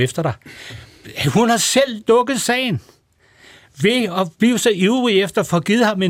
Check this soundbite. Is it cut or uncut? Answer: uncut